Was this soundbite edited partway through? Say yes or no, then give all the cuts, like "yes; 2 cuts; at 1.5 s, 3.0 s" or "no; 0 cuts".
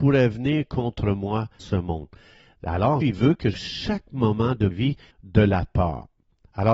yes; 5 cuts; at 1.6 s, 3.0 s, 3.5 s, 4.7 s, 5.1 s